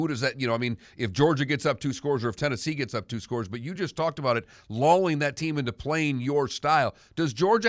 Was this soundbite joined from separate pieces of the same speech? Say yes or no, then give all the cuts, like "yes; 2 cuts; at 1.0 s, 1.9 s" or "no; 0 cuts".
no; 0 cuts